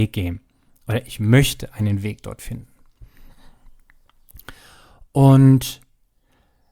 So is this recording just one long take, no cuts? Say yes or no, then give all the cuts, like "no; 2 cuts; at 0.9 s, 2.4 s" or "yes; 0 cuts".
yes; 0 cuts